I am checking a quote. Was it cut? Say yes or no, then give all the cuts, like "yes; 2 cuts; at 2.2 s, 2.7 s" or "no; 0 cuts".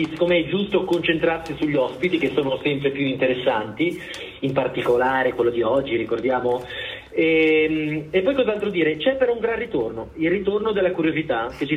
no; 0 cuts